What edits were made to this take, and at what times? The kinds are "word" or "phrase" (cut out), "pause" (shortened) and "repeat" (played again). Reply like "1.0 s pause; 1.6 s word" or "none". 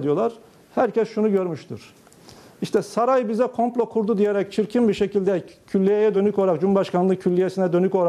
none

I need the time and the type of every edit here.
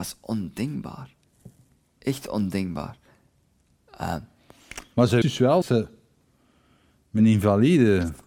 5.2 s word; 5.6 s word; 7.2 s word

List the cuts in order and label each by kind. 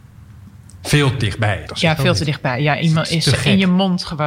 1.2 s word; 1.7 s phrase

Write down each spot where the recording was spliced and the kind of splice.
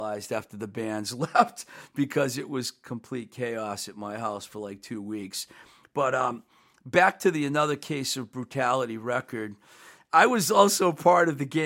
none

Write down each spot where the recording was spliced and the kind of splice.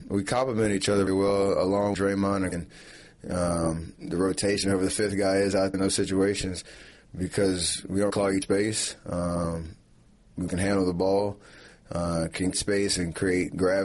1.1 s word; 1.9 s word; 2.5 s word; 5.7 s word; 8.1 s word; 8.4 s word; 10.5 s word; 12.5 s word

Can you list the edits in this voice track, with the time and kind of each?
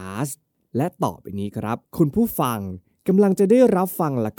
1.9 s pause

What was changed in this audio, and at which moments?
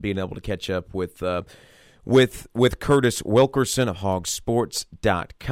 none

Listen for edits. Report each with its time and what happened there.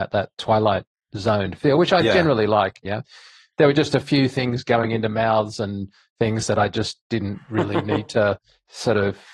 none

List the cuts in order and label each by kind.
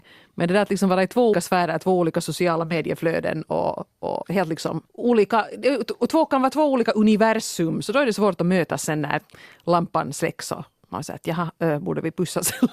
1.3 s word; 4.2 s word; 4.9 s pause

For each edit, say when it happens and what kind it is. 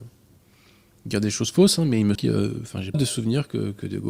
2.1 s word; 2.9 s word

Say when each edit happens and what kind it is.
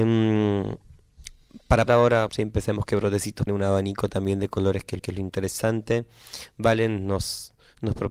1.9 s word; 2.3 s word; 3.5 s word; 5.0 s repeat

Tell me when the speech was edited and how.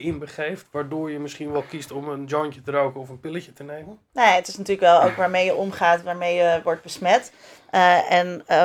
none

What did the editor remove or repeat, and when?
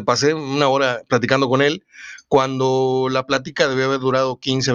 none

